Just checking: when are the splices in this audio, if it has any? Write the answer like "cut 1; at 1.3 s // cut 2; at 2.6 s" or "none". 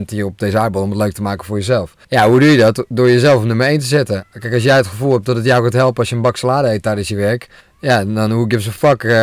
cut 1; at 2.0 s // cut 2; at 7.6 s